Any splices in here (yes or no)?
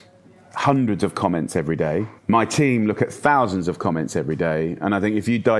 yes